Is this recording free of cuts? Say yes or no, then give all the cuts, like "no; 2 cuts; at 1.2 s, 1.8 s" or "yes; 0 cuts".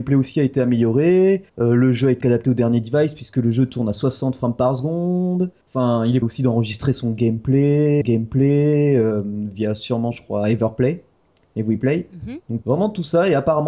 no; 6 cuts; at 1.5 s, 2.2 s, 5.6 s, 6.2 s, 8.0 s, 12.6 s